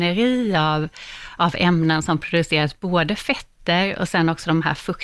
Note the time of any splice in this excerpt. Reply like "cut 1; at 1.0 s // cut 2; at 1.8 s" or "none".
none